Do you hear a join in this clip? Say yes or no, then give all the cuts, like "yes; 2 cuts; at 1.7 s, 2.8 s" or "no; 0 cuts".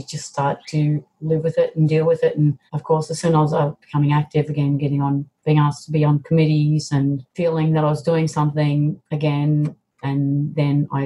yes; 3 cuts; at 2.7 s, 5.4 s, 7.3 s